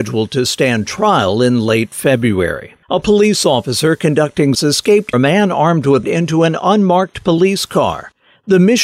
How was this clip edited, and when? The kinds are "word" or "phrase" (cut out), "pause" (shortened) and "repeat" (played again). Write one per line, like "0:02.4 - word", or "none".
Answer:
0:02.8 - pause
0:04.5 - word
0:05.1 - phrase
0:06.0 - phrase

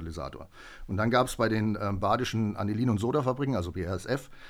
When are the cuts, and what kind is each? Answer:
none

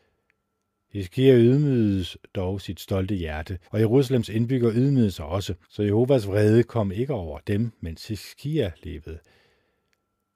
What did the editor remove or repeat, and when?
0:03.6 - pause
0:05.6 - pause

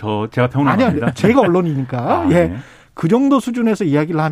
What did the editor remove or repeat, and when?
none

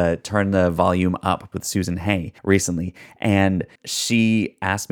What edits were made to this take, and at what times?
0:01.5 - word
0:02.4 - pause
0:03.8 - pause

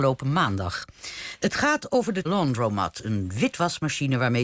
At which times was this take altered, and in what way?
0:02.2 - word

